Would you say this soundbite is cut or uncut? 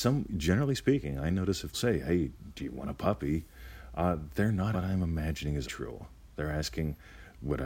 cut